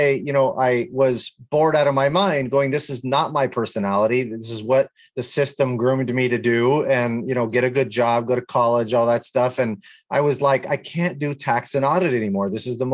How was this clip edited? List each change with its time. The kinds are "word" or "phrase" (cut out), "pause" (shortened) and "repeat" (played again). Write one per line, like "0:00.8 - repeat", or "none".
none